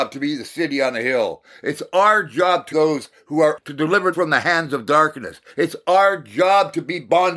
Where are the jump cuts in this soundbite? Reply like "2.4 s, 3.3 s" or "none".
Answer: 2.7 s, 3.6 s, 4.1 s